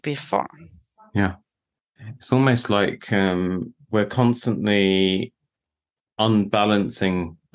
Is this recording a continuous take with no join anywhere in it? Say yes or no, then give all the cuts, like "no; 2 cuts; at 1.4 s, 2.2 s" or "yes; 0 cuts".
yes; 0 cuts